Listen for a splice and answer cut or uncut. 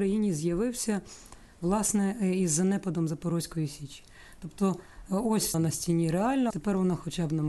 cut